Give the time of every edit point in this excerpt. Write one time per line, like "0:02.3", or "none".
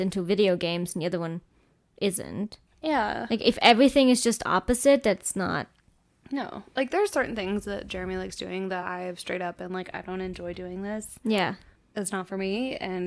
none